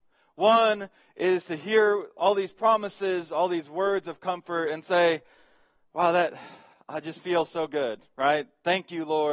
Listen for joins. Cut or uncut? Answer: uncut